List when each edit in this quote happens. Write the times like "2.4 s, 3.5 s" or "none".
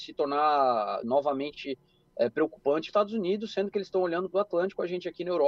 1.0 s, 2.9 s, 4.3 s